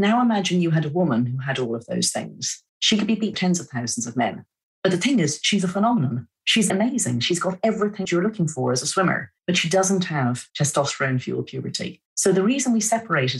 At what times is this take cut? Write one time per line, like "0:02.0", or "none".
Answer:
0:02.7
0:03.3
0:04.6
0:06.7
0:08.0
0:09.4
0:10.5
0:12.1